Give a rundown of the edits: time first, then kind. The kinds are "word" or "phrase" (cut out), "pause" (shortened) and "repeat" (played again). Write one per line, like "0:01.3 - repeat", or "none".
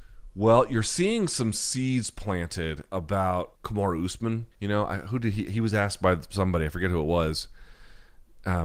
0:03.6 - word
0:04.5 - pause